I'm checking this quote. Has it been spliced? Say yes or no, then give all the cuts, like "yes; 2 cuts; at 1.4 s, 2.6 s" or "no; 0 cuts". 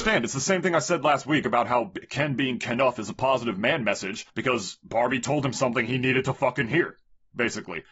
yes; 1 cut; at 4.3 s